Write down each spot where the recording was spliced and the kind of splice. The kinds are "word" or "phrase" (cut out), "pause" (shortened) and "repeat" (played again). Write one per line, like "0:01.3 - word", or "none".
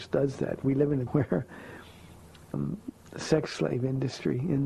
0:01.1 - word
0:02.5 - word